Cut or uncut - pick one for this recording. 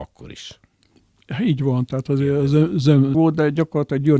cut